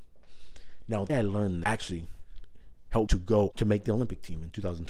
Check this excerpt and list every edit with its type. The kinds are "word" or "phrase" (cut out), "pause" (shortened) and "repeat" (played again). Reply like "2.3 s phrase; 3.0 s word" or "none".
1.1 s word; 1.6 s word; 3.1 s word; 3.5 s word